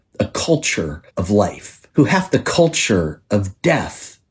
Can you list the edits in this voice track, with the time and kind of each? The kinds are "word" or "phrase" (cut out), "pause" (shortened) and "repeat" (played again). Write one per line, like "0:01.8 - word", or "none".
0:01.1 - pause
0:01.9 - pause
0:02.3 - phrase

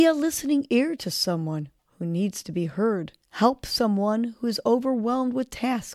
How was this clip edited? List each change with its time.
0:03.2 - pause

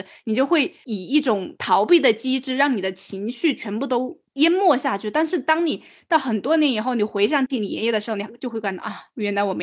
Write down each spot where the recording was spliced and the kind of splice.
none

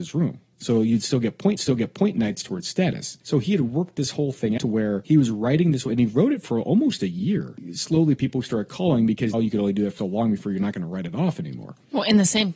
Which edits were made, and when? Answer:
0:01.6 - repeat
0:03.2 - pause
0:04.6 - word
0:09.3 - word
0:10.0 - word

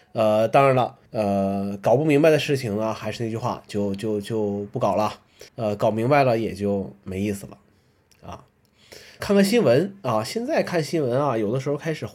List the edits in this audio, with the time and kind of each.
0:01.1 - pause
0:05.5 - pause
0:09.2 - word

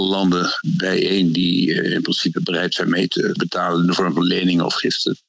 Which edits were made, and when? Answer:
none

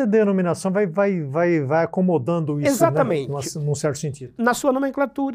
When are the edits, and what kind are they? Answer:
none

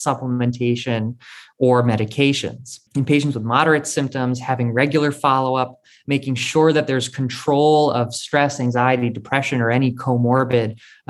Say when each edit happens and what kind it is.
0:02.9 - pause

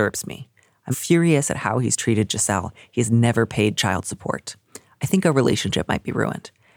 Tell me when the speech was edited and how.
0:00.9 - word

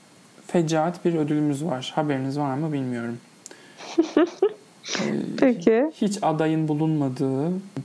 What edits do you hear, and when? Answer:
none

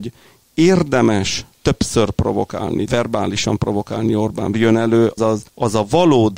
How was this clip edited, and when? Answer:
0:01.5 - pause
0:02.9 - word
0:04.5 - phrase
0:05.2 - word
0:05.5 - pause

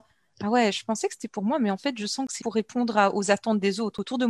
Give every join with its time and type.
0:02.4 - word

